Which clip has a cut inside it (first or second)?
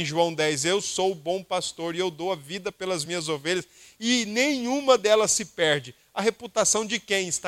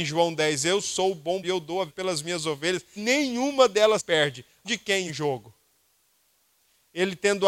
second